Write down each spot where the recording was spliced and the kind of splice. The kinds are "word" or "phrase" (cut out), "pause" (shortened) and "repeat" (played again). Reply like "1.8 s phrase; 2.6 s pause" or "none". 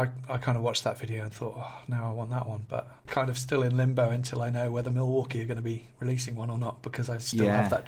3.0 s pause